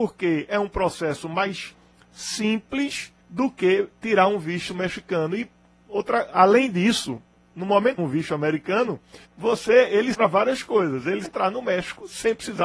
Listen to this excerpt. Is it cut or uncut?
cut